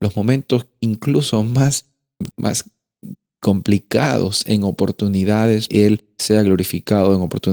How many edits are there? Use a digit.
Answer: 2